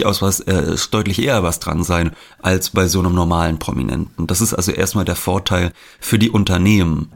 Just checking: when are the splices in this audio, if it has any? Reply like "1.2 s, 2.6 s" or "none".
none